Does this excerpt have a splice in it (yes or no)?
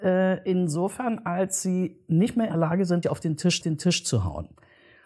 yes